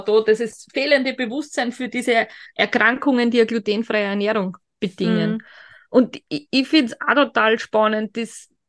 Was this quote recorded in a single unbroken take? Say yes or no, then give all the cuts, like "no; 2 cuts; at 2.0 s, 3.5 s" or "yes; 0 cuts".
yes; 0 cuts